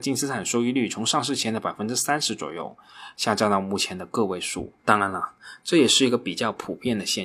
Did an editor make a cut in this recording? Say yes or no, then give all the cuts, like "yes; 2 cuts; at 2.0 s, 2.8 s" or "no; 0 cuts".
yes; 1 cut; at 4.8 s